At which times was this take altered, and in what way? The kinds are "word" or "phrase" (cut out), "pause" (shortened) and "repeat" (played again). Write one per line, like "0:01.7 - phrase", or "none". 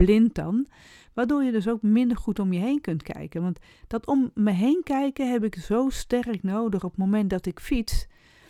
none